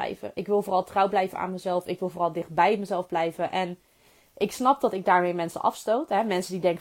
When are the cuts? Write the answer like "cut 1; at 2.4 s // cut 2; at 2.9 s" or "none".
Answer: none